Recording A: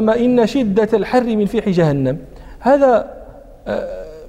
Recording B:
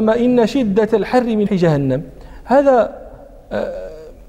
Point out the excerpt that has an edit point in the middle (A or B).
B